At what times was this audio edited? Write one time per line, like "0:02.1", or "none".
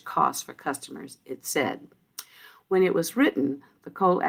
none